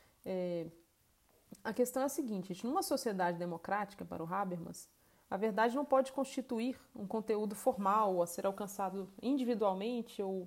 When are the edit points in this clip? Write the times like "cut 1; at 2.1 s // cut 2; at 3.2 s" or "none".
none